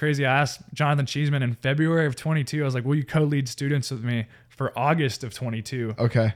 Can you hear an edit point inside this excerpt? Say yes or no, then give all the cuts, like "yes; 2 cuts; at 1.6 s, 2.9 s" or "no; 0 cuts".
no; 0 cuts